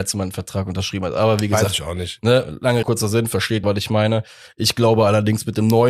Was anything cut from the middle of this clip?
yes; 2 cuts; at 2.8 s, 3.6 s

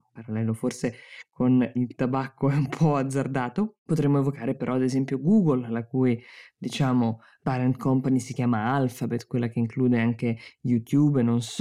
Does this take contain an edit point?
no; 0 cuts

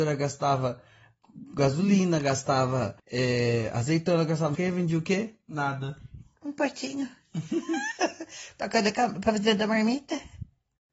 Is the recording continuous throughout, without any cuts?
no; 2 cuts; at 3.0 s, 4.5 s

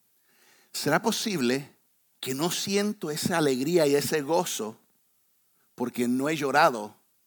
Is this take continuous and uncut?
yes; 0 cuts

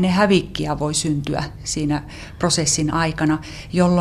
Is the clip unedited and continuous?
yes; 0 cuts

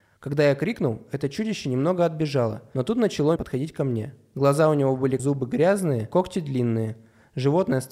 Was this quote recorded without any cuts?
no; 2 cuts; at 3.4 s, 5.2 s

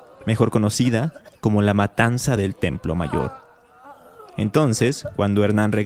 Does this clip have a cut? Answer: no; 0 cuts

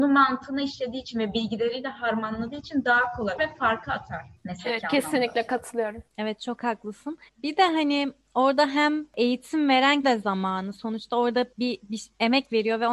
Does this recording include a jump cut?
yes; 6 cuts; at 3.4 s, 4.4 s, 6.1 s, 7.3 s, 10.0 s, 11.5 s

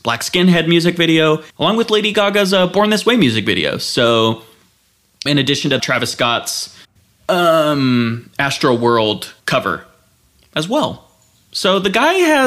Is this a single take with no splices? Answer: no; 5 cuts; at 1.5 s, 5.3 s, 5.8 s, 6.8 s, 9.4 s

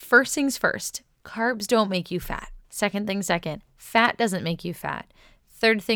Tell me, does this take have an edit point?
yes; 1 cut; at 2.6 s

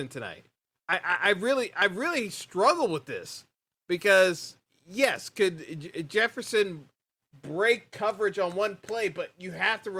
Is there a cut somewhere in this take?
no; 0 cuts

